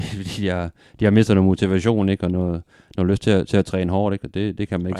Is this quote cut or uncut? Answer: uncut